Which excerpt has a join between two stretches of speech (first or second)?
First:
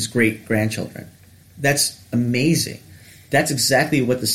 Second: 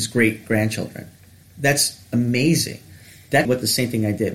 second